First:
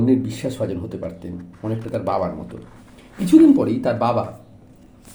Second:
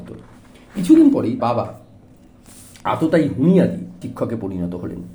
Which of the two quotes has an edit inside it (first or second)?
second